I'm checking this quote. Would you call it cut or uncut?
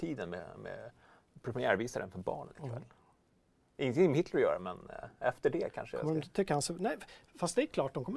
uncut